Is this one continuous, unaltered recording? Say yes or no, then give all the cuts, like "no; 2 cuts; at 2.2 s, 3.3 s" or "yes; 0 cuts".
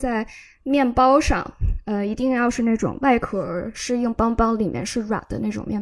yes; 0 cuts